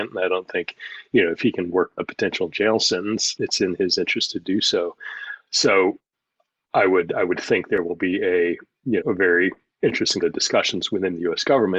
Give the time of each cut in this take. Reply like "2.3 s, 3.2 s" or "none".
2.0 s, 3.4 s, 9.0 s, 10.2 s

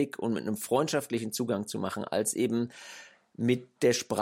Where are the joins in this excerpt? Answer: none

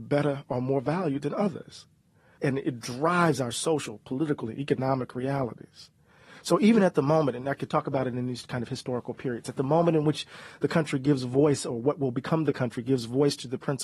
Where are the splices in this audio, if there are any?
none

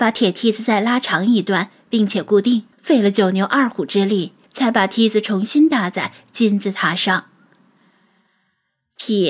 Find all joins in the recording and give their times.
2.7 s, 4.4 s

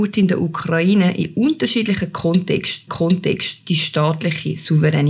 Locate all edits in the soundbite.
2.9 s

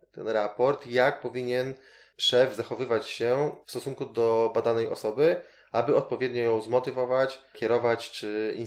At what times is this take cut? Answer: 3.6 s

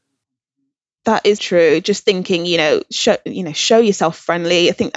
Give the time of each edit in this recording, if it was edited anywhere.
1.4 s

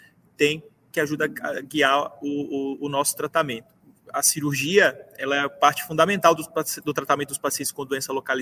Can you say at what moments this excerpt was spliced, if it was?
none

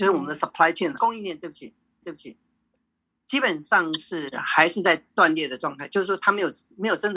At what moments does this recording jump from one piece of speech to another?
1.0 s, 2.0 s

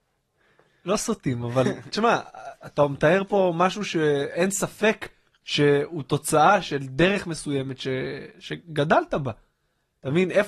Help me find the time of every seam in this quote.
none

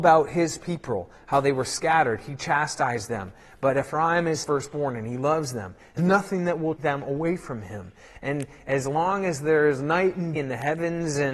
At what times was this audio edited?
4.4 s, 6.0 s, 6.8 s, 10.4 s

